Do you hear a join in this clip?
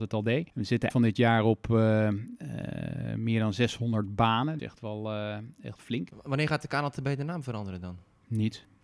yes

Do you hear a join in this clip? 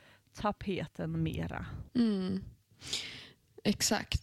yes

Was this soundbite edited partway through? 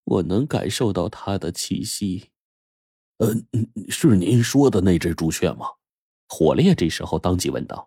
no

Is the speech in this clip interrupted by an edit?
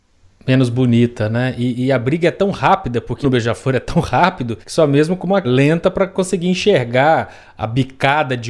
yes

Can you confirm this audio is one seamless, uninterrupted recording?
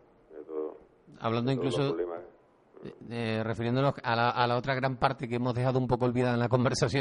yes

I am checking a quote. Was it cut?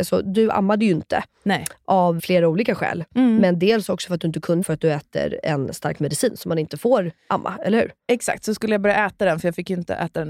yes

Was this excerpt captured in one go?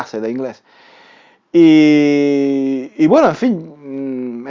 yes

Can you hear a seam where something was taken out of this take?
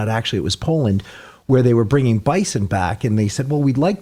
no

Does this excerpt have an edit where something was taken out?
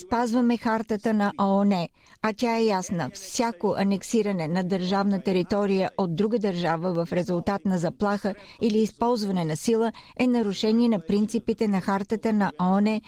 no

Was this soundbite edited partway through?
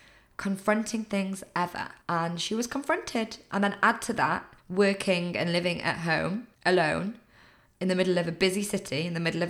yes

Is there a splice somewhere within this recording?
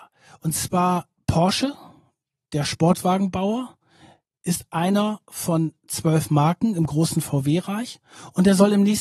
no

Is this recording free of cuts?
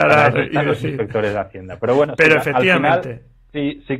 yes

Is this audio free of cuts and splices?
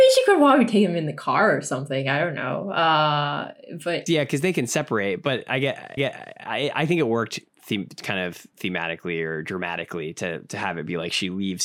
no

